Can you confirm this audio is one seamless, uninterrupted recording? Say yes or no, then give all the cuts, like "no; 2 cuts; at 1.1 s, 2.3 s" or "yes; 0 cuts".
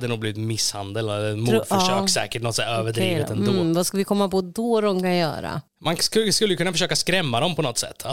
no; 1 cut; at 5.7 s